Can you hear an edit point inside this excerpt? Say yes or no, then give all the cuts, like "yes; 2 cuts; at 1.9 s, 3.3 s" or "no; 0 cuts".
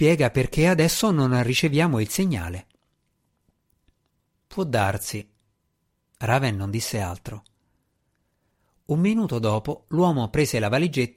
no; 0 cuts